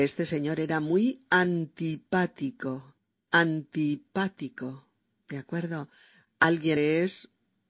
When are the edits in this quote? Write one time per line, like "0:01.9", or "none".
0:06.8